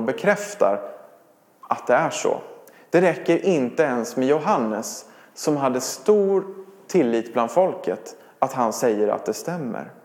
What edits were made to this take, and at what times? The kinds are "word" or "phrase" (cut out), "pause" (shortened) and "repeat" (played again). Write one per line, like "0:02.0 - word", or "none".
none